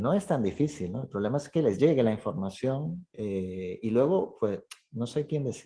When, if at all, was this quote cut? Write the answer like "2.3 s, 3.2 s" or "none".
none